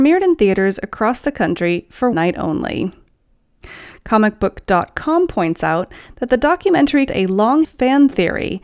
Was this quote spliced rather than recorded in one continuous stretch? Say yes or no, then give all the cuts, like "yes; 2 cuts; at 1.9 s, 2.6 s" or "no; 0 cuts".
yes; 3 cuts; at 2.1 s, 7.1 s, 7.6 s